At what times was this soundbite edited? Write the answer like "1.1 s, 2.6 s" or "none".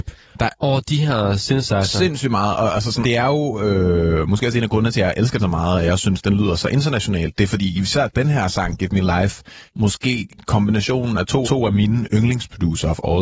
3.0 s, 5.4 s, 9.7 s, 11.4 s